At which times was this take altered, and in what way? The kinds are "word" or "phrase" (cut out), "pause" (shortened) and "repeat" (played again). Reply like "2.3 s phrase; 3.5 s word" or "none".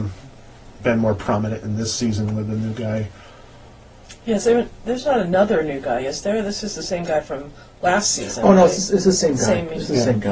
none